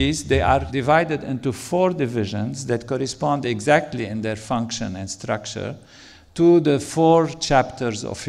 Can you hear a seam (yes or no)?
no